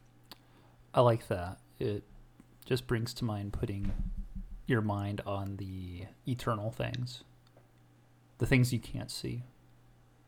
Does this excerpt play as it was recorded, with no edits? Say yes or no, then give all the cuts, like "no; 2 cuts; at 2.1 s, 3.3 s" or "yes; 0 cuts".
yes; 0 cuts